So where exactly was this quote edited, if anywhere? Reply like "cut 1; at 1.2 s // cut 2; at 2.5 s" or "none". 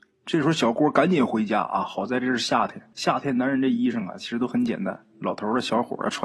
cut 1; at 2.9 s

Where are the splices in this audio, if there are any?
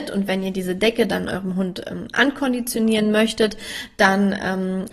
none

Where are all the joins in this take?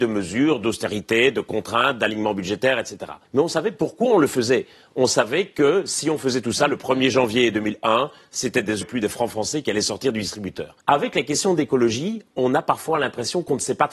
cut 1; at 3.2 s // cut 2; at 8.8 s // cut 3; at 10.8 s

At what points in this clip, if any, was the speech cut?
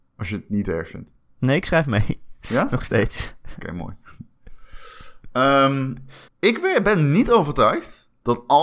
cut 1; at 6.3 s

